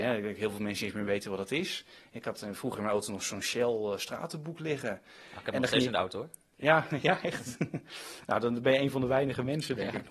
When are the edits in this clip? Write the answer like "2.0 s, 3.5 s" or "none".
none